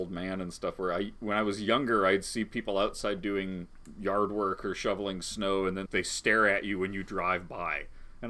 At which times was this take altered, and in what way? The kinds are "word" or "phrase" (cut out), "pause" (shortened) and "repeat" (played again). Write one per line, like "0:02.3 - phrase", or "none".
0:05.9 - word